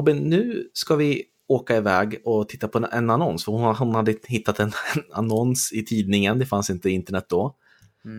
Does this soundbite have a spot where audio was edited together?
no; 0 cuts

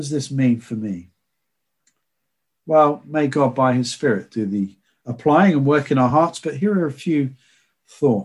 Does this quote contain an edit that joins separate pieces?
no; 0 cuts

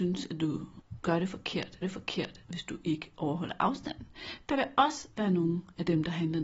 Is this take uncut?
no; 1 cut; at 1.8 s

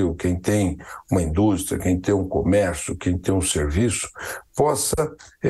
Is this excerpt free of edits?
yes; 0 cuts

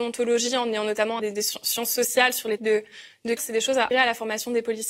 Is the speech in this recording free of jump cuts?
no; 4 cuts; at 1.2 s, 2.6 s, 3.4 s, 3.9 s

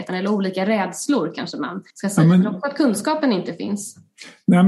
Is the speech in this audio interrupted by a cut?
yes; 1 cut; at 1.9 s

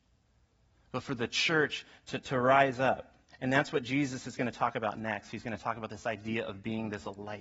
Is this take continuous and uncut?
no; 1 cut; at 3.3 s

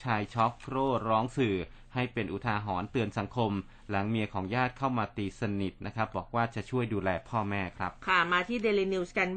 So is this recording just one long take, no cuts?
yes; 0 cuts

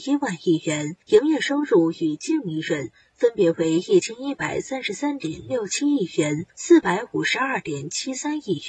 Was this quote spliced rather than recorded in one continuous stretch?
yes; 2 cuts; at 1.0 s, 6.5 s

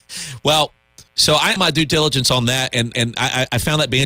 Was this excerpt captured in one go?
no; 3 cuts; at 1.1 s, 1.6 s, 2.9 s

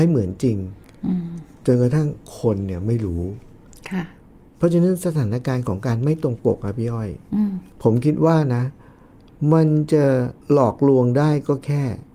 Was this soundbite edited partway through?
yes; 2 cuts; at 7.7 s, 10.4 s

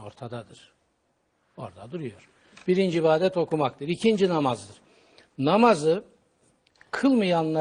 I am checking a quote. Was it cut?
no; 0 cuts

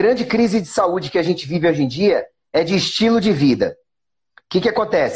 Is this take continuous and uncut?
yes; 0 cuts

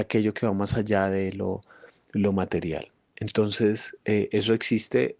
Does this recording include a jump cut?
no; 0 cuts

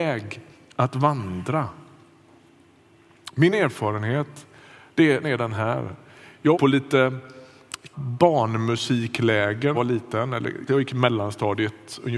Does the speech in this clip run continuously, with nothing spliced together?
no; 6 cuts; at 3.5 s, 5.2 s, 6.5 s, 7.9 s, 9.7 s, 10.7 s

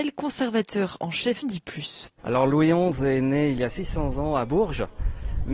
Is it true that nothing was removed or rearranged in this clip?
no; 1 cut; at 1.4 s

